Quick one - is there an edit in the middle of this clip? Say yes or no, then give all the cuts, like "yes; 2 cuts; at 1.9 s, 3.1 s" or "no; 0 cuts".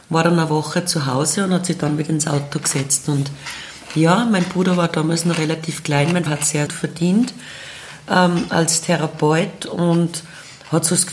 yes; 2 cuts; at 6.3 s, 6.7 s